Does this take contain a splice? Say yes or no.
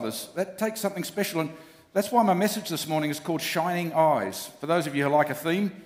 no